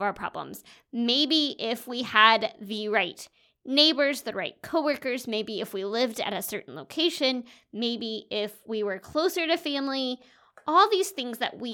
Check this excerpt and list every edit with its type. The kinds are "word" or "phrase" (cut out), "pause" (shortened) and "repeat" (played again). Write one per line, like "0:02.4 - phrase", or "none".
none

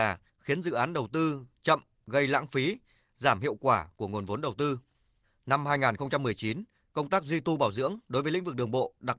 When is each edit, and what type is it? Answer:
none

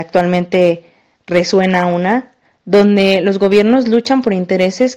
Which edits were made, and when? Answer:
none

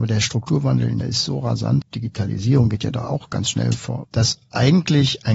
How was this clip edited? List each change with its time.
0:01.0 - word
0:01.8 - word
0:04.0 - word

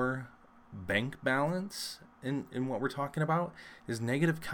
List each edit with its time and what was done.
none

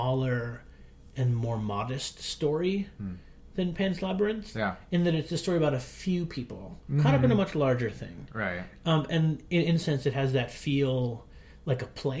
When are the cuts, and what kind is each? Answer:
0:09.8 - word

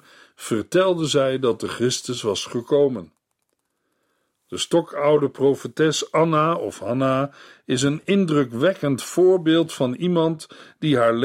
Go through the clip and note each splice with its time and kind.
none

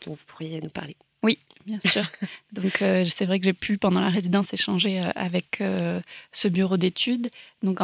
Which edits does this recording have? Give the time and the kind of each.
none

